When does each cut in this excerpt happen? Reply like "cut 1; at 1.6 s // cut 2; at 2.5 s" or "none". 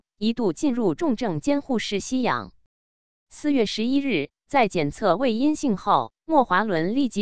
none